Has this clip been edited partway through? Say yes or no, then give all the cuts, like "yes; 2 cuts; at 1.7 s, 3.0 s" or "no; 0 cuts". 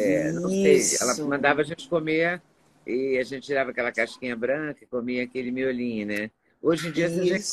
no; 0 cuts